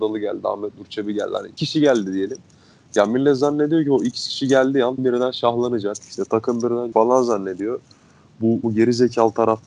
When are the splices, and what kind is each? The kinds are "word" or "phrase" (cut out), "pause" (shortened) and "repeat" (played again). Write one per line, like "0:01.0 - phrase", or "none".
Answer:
0:01.6 - word
0:05.0 - word
0:06.9 - word
0:08.6 - word

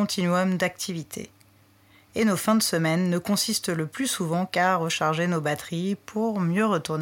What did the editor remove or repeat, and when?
none

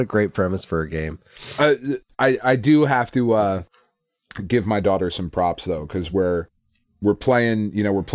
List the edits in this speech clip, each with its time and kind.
none

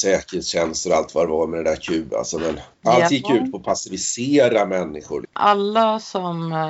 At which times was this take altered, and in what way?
0:02.7 - pause
0:05.3 - pause

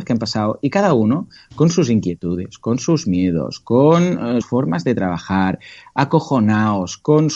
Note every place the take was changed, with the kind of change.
0:04.4 - word

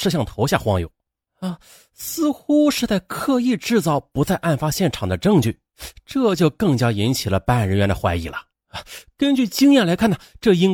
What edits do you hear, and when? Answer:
0:08.5 - pause

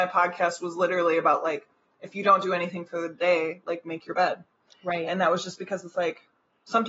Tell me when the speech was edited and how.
none

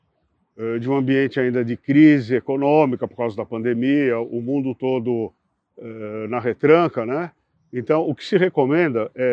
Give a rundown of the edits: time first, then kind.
none

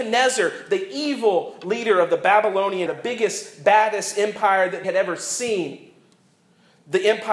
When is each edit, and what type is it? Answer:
0:02.9 - word
0:04.8 - word

